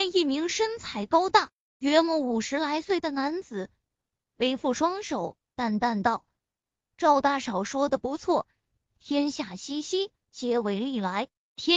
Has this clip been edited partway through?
no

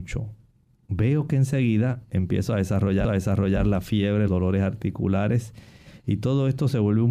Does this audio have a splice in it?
yes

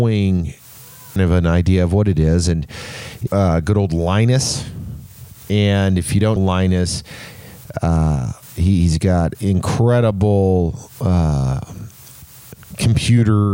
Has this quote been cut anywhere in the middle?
yes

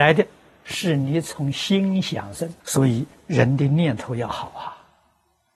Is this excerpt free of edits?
no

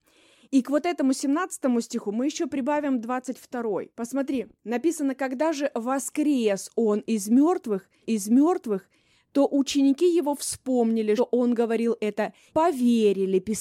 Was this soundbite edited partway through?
yes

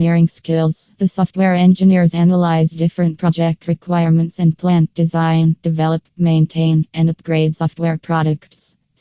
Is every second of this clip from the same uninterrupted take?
no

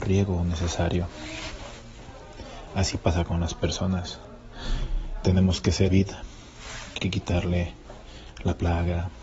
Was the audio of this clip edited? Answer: yes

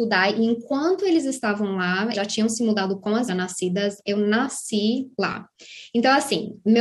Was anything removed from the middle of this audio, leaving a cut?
yes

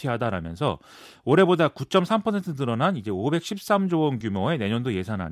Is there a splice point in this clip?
no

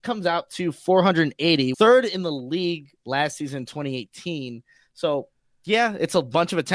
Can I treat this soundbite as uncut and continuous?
no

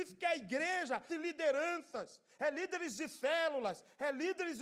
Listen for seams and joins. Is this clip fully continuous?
no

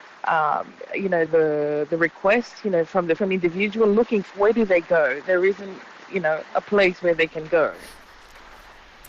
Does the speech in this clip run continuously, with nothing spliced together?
no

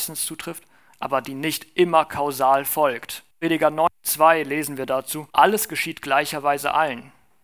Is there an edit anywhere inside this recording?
yes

